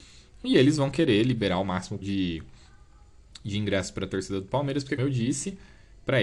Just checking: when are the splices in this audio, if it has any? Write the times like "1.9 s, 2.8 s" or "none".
2.0 s, 5.0 s